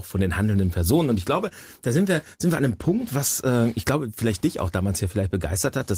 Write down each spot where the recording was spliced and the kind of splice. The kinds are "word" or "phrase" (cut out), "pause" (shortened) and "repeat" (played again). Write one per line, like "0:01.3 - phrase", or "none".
none